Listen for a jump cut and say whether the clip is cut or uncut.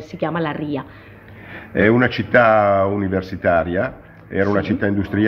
uncut